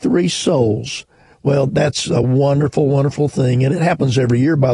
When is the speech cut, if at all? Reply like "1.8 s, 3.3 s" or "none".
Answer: none